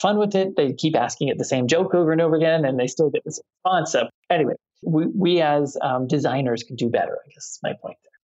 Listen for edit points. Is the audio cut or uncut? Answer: cut